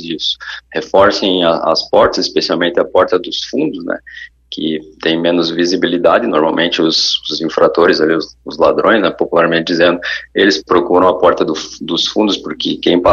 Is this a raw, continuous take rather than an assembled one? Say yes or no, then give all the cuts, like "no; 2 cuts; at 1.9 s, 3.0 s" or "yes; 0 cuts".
yes; 0 cuts